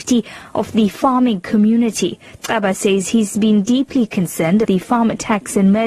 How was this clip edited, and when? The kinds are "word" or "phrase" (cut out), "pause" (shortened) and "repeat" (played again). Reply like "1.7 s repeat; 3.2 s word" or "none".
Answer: 4.6 s word